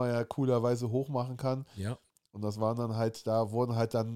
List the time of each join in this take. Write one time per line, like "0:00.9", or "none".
none